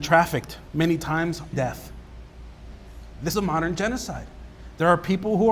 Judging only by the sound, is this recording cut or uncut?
cut